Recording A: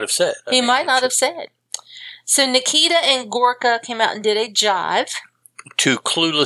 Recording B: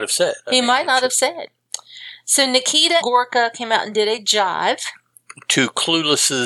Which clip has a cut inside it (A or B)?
B